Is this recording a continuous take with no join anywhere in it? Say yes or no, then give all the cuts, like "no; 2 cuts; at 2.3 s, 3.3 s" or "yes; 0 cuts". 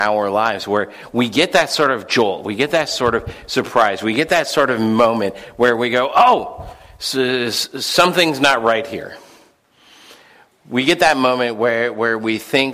yes; 0 cuts